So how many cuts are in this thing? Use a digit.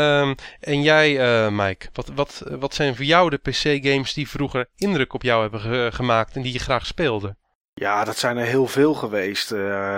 0